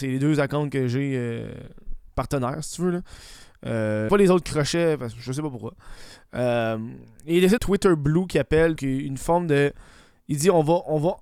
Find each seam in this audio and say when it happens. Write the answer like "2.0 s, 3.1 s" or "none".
2.1 s, 4.1 s, 7.6 s, 8.8 s